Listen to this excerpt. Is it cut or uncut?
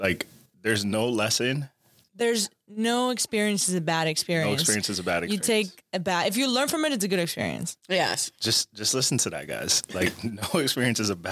uncut